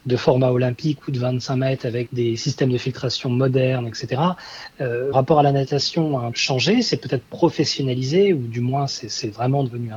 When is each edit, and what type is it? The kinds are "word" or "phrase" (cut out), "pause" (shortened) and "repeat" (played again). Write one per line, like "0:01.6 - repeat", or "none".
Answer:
0:02.1 - word
0:05.1 - phrase
0:06.3 - word